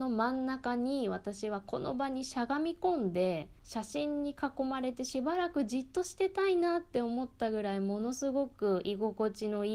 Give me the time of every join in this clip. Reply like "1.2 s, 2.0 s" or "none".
3.6 s